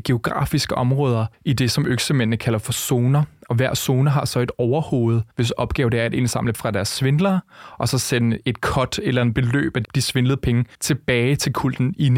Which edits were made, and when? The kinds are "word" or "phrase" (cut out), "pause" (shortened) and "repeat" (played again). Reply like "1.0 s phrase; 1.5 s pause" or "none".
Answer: 1.3 s pause; 5.3 s pause; 6.5 s word; 9.8 s word; 10.7 s pause